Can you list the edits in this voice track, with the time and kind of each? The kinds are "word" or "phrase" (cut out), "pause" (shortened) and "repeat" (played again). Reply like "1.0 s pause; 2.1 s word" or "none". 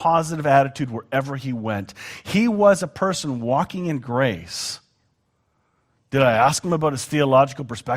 none